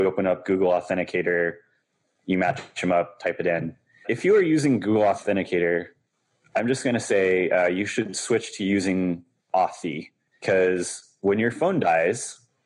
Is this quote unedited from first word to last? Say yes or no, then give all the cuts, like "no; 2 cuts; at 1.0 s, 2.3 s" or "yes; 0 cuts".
yes; 0 cuts